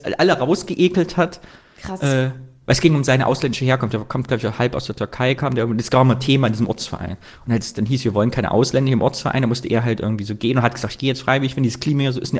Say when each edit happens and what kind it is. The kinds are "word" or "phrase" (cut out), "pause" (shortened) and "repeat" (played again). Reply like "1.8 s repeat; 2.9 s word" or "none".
none